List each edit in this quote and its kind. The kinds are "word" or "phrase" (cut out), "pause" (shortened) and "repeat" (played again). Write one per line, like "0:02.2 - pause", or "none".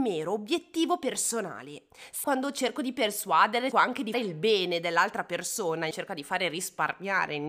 0:02.2 - word
0:03.7 - word
0:04.1 - word
0:05.9 - word